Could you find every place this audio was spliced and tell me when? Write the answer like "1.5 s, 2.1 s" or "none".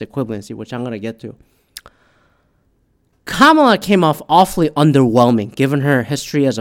none

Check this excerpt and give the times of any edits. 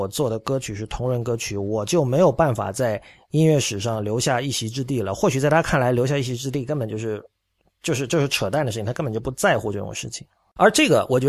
none

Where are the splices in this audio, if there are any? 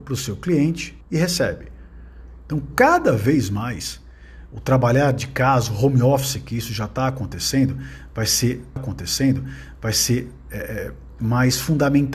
1.0 s, 8.8 s

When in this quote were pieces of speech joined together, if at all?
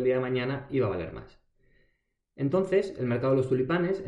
none

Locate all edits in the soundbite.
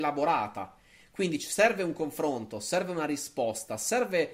none

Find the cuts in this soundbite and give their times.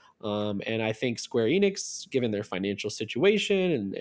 none

